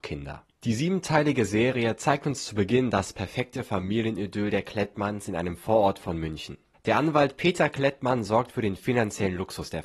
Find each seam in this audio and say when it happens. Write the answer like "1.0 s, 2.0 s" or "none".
none